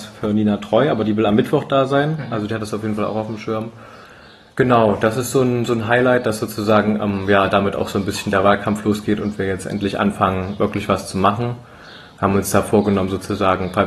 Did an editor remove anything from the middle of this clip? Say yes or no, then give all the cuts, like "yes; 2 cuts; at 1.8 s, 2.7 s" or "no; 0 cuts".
no; 0 cuts